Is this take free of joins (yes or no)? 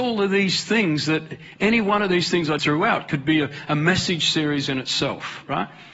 no